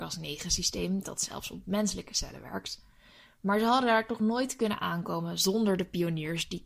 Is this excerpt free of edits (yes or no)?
yes